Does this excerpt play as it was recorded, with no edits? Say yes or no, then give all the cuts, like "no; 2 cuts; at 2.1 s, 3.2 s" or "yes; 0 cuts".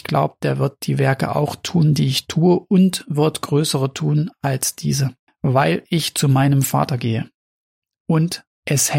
yes; 0 cuts